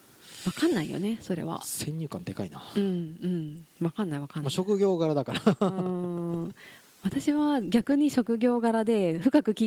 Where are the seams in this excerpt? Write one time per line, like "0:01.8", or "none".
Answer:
none